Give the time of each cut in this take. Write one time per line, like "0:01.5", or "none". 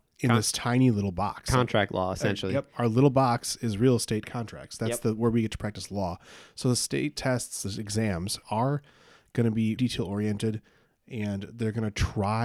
0:08.4
0:09.8